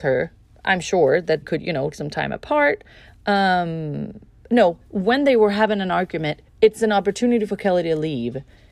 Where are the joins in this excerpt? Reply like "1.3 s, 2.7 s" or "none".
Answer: 1.4 s, 1.9 s, 6.5 s